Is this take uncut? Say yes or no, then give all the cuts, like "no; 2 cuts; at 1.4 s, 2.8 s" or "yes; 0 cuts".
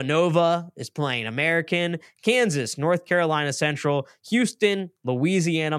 yes; 0 cuts